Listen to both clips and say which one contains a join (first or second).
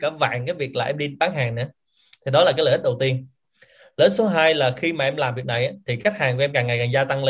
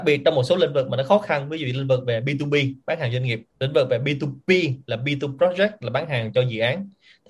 second